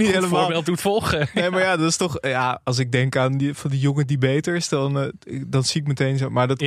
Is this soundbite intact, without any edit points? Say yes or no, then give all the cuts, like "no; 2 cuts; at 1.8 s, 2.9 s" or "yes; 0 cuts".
yes; 0 cuts